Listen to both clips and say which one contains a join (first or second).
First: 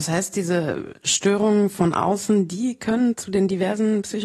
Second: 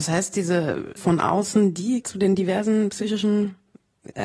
second